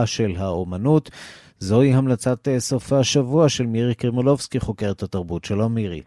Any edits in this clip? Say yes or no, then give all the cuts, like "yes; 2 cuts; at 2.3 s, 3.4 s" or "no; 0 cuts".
no; 0 cuts